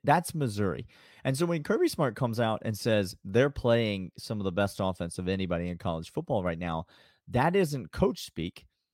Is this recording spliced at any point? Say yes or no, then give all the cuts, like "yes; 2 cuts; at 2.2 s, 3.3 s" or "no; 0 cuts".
no; 0 cuts